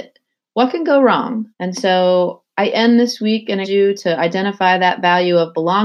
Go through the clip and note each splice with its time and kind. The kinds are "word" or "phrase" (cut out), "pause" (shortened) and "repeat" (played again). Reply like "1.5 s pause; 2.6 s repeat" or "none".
1.5 s pause; 3.6 s word